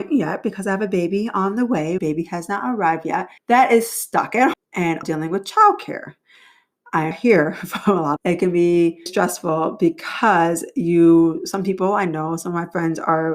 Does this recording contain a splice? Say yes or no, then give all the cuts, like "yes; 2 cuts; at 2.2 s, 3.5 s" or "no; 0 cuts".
yes; 7 cuts; at 2.0 s, 3.4 s, 4.5 s, 5.0 s, 7.1 s, 8.2 s, 9.1 s